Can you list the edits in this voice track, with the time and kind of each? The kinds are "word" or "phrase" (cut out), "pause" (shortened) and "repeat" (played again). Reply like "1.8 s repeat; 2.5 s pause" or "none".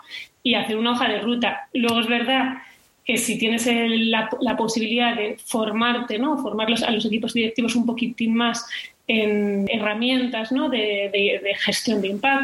none